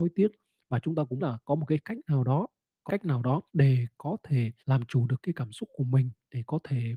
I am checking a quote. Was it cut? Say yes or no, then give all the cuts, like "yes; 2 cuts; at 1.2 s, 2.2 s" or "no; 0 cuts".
yes; 4 cuts; at 1.2 s, 2.9 s, 3.5 s, 4.6 s